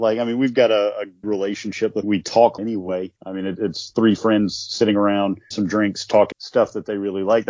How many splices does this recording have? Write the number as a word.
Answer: six